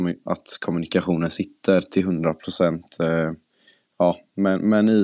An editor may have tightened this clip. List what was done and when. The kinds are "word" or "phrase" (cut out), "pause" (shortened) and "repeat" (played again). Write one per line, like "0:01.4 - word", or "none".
none

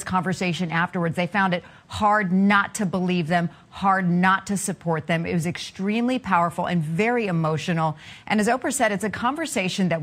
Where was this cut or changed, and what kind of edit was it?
none

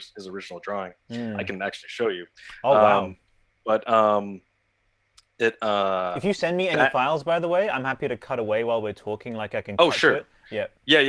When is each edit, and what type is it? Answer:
none

